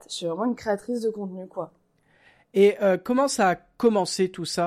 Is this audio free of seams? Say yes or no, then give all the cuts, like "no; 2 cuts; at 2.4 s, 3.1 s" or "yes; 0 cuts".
yes; 0 cuts